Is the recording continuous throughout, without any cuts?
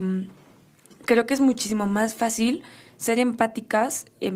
yes; 0 cuts

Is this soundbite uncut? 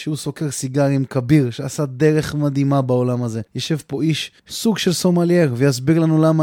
no; 2 cuts; at 3.5 s, 4.4 s

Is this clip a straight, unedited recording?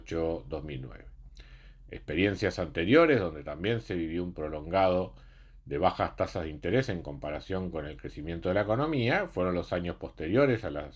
no; 1 cut; at 4.3 s

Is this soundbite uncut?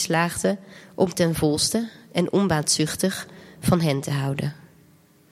yes; 0 cuts

